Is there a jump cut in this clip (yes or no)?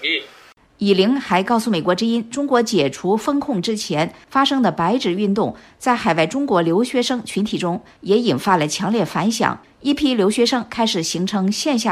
no